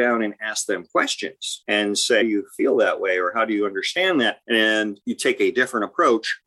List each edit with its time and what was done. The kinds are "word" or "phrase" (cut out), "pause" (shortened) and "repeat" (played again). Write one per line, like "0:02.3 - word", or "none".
0:02.2 - word